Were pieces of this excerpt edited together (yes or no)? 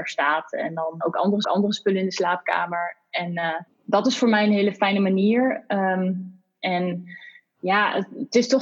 yes